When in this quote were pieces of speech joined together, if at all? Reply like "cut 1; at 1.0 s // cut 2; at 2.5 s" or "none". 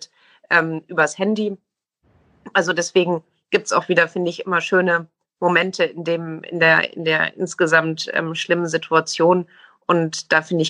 none